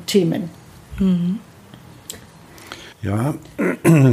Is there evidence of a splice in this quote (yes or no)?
yes